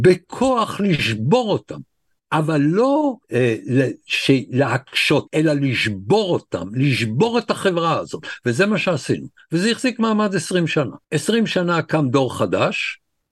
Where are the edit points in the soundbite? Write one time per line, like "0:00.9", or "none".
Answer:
0:03.2
0:05.3
0:11.0